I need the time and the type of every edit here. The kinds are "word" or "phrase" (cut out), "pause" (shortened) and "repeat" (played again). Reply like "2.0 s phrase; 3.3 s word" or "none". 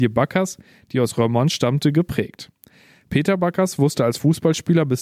none